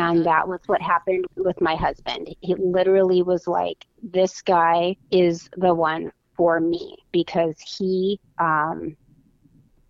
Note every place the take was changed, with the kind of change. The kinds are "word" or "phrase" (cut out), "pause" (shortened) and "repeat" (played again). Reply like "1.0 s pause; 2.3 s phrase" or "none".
1.3 s word; 5.0 s pause; 8.3 s pause